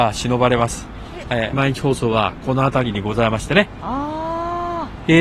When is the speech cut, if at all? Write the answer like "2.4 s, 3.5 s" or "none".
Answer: 1.5 s